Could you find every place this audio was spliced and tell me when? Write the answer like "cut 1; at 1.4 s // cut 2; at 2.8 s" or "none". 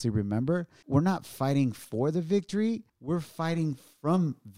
cut 1; at 2.9 s